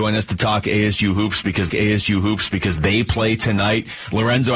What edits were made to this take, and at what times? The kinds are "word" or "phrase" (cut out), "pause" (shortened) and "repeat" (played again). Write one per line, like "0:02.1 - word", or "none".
0:01.7 - repeat